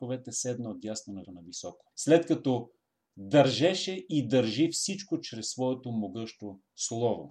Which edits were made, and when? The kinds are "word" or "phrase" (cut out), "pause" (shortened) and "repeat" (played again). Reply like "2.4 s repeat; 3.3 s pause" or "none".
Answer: 1.2 s word; 1.9 s pause